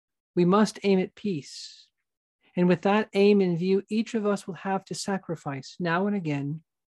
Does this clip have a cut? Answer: no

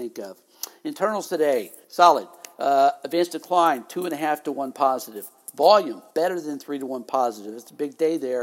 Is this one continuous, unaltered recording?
no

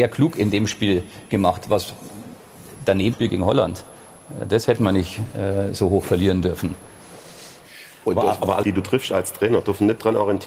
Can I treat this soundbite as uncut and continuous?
no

